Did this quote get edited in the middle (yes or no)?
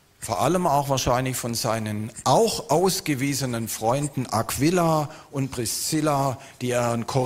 no